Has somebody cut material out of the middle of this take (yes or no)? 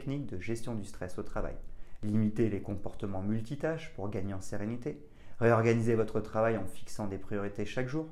no